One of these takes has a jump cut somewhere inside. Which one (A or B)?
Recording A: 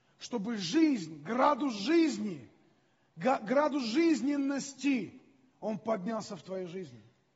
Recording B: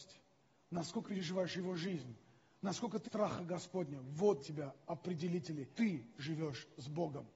B